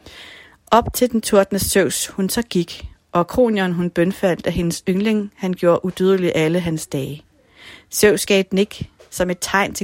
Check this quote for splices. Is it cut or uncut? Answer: uncut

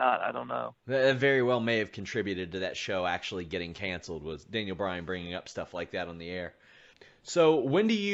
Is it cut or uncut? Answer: uncut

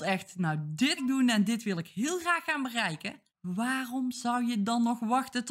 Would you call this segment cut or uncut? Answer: cut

